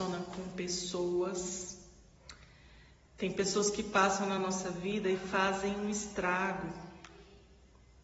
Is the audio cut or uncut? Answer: uncut